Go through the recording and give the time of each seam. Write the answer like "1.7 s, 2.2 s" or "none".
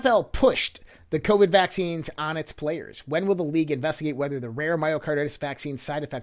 none